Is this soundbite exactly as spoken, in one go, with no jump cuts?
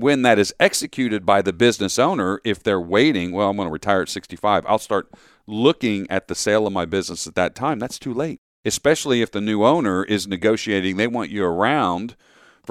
yes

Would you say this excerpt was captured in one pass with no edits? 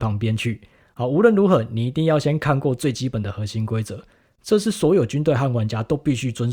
yes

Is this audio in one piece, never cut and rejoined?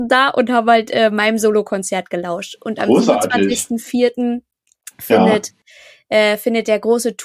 yes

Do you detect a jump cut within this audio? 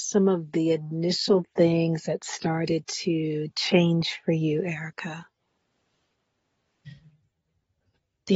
no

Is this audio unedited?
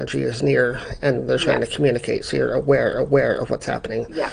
no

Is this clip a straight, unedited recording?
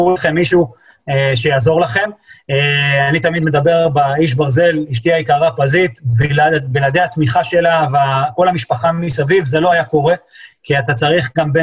yes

